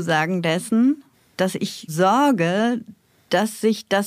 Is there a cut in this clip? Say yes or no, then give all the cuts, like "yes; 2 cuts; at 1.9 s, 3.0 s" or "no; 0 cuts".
yes; 2 cuts; at 1.1 s, 1.9 s